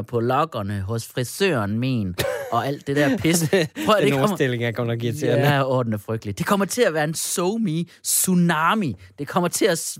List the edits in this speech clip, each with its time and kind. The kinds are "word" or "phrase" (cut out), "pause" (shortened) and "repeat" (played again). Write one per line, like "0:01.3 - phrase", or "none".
none